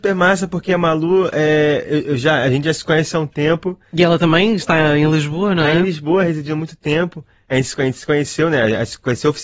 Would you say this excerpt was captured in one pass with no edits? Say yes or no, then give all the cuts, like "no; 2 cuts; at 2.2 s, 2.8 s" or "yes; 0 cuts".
yes; 0 cuts